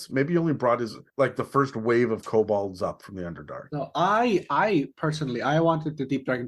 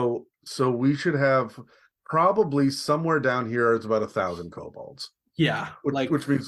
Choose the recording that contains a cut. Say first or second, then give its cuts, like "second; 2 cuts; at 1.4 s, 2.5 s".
first; 1 cut; at 1.1 s